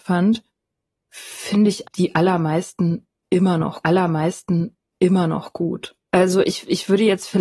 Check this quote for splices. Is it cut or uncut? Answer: cut